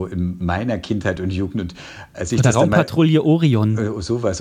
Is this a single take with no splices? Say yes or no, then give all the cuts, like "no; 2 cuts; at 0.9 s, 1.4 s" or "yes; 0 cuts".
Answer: yes; 0 cuts